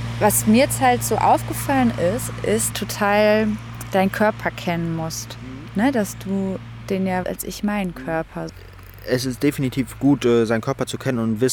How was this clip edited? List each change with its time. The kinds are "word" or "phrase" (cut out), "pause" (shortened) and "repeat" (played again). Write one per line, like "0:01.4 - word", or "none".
0:02.7 - phrase
0:07.2 - phrase